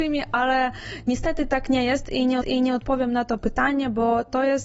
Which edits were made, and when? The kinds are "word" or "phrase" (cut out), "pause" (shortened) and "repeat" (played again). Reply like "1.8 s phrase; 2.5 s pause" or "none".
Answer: 2.4 s repeat